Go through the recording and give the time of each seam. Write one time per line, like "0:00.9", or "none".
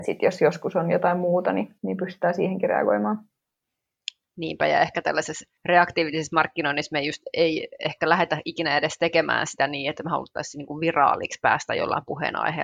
0:01.8
0:05.6